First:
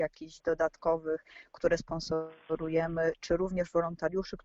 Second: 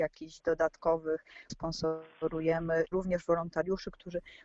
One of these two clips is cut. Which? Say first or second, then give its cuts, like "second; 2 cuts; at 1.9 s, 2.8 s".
second; 2 cuts; at 1.5 s, 2.9 s